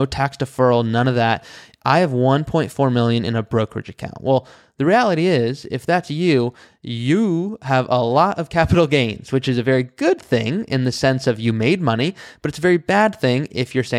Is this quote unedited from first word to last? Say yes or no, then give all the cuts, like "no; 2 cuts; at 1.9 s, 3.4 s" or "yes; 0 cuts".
yes; 0 cuts